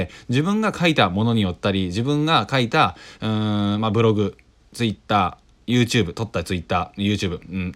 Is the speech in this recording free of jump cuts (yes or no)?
yes